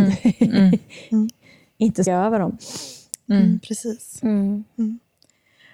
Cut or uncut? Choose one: cut